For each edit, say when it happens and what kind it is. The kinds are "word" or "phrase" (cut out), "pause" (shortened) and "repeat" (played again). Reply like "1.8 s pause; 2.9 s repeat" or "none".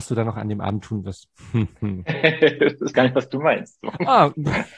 2.9 s word